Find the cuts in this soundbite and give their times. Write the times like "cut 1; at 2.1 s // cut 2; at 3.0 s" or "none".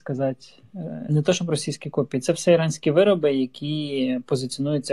cut 1; at 1.1 s